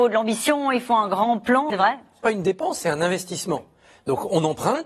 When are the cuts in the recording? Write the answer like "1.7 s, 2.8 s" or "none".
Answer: 1.7 s